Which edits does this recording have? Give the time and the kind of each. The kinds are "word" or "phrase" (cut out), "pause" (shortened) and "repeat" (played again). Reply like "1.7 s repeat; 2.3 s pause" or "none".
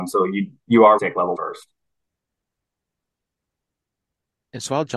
1.0 s word; 1.3 s word